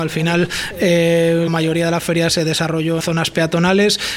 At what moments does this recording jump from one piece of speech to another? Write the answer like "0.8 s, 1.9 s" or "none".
1.5 s, 2.3 s, 3.0 s